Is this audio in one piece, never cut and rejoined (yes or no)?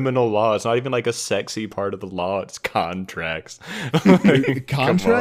yes